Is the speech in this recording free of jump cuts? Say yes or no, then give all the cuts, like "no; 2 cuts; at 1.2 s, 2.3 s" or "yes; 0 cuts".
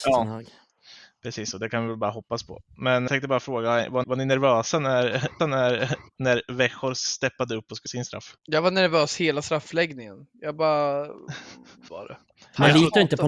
no; 6 cuts; at 3.1 s, 4.0 s, 5.4 s, 7.9 s, 8.4 s, 11.9 s